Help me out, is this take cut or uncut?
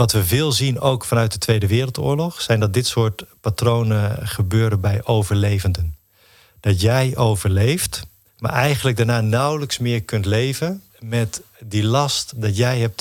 cut